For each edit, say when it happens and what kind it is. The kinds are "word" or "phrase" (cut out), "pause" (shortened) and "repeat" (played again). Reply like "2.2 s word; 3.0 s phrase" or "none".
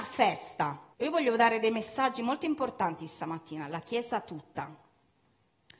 0.9 s pause